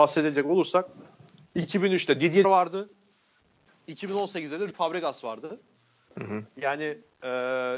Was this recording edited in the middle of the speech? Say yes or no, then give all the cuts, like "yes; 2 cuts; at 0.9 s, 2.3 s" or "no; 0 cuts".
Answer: yes; 2 cuts; at 2.4 s, 4.7 s